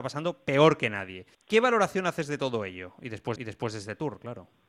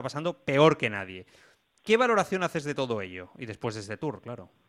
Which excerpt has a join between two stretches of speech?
first; 2 cuts; at 1.3 s, 3.4 s

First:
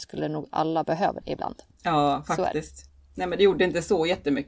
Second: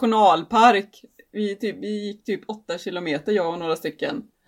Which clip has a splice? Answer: first; 2 cuts; at 1.2 s, 2.9 s

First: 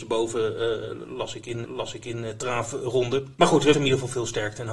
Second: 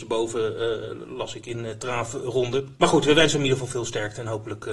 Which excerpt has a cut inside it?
first; 2 cuts; at 1.6 s, 3.7 s

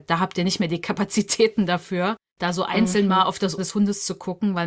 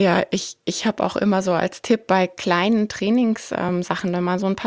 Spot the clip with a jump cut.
first; 1 cut; at 3.6 s

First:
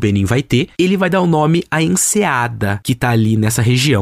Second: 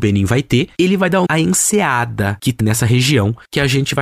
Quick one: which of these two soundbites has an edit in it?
second; 2 cuts; at 1.3 s, 2.6 s

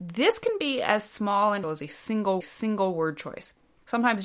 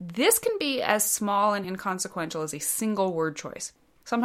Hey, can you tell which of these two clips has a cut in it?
first; 2 cuts; at 1.6 s, 2.4 s

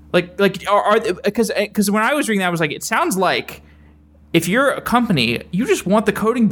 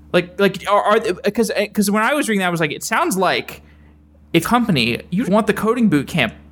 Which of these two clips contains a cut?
second; 2 cuts; at 4.4 s, 5.2 s

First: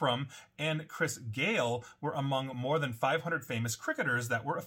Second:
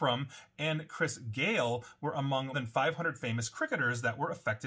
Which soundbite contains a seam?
second; 1 cut; at 2.5 s

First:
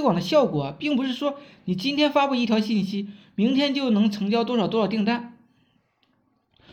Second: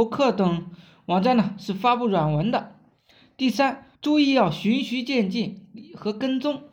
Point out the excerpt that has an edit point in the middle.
second; 1 cut; at 3.9 s

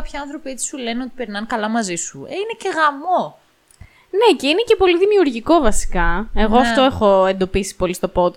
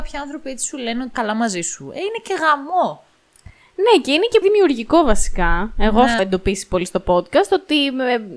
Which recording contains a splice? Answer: second; 3 cuts; at 1.1 s, 4.4 s, 6.2 s

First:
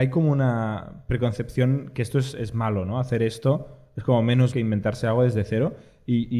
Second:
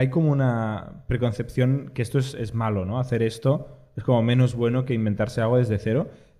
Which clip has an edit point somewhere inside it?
first; 1 cut; at 4.5 s

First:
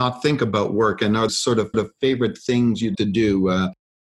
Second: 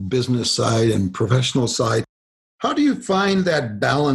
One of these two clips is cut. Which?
first; 3 cuts; at 1.3 s, 1.7 s, 2.9 s

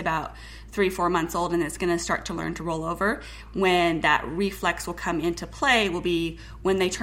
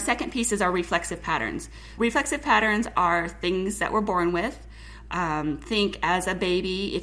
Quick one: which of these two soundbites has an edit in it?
second; 1 cut; at 2.0 s

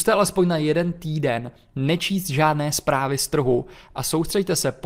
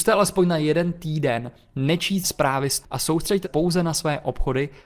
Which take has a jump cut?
second; 3 cuts; at 2.2 s, 2.8 s, 3.4 s

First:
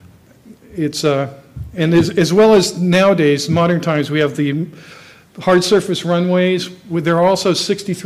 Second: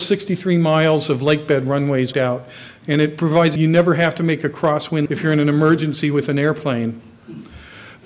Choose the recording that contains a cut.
second; 3 cuts; at 2.1 s, 3.6 s, 5.1 s

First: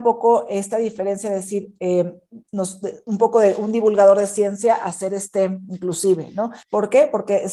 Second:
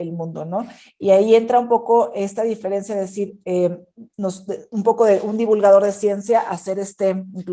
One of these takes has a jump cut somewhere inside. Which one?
first; 1 cut; at 6.6 s

